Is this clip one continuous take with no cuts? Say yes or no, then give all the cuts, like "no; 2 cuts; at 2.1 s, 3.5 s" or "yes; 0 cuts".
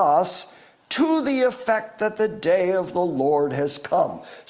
yes; 0 cuts